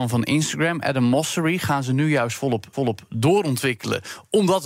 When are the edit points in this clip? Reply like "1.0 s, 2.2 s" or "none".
2.7 s